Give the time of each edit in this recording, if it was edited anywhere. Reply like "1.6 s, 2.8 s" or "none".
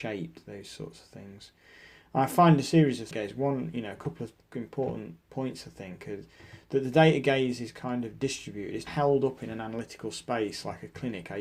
3.1 s, 5.3 s, 8.9 s